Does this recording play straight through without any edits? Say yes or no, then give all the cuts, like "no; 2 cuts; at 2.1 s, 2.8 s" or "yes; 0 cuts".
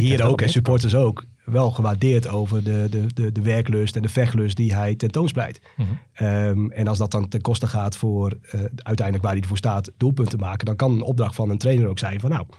yes; 0 cuts